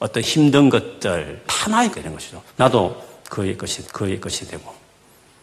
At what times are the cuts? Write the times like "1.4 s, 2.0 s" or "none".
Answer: 1.4 s, 1.9 s, 2.5 s, 3.8 s